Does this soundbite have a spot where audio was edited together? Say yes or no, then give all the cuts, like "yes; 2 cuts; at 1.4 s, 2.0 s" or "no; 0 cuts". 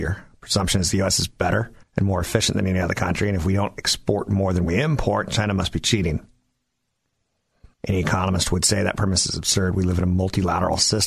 yes; 2 cuts; at 1.8 s, 7.7 s